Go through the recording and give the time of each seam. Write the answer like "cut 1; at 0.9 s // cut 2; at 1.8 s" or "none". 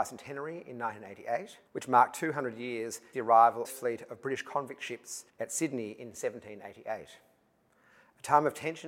cut 1; at 1.7 s // cut 2; at 3.1 s // cut 3; at 3.6 s // cut 4; at 5.3 s